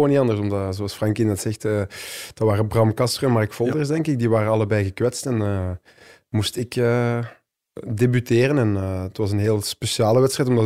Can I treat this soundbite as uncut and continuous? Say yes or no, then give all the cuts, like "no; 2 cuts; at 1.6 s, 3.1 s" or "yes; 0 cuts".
yes; 0 cuts